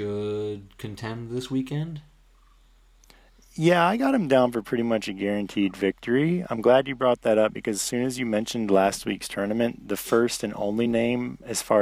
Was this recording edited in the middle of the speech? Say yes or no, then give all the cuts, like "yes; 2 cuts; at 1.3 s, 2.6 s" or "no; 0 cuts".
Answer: no; 0 cuts